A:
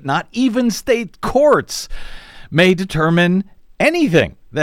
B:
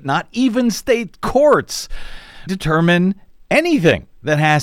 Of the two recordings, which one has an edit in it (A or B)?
B